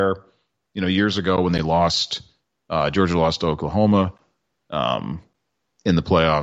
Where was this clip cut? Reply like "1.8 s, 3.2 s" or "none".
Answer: none